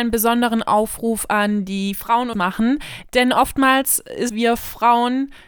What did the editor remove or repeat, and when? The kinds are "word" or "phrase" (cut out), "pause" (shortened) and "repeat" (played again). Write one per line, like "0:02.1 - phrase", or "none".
0:02.3 - phrase
0:04.3 - phrase

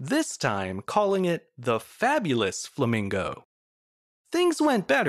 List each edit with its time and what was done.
none

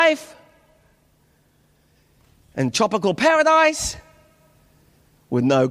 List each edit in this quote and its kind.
none

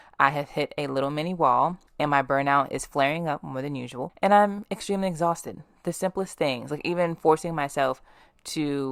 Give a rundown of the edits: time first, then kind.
0:01.9 - pause

